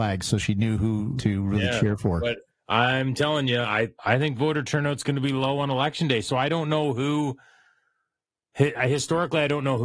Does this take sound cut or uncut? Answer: cut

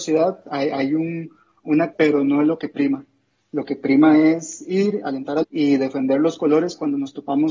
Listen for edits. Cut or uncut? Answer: cut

